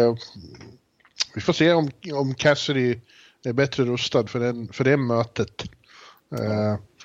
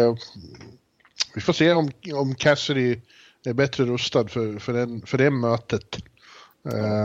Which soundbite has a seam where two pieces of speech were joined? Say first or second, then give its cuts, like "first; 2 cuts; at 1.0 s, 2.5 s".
first; 1 cut; at 4.3 s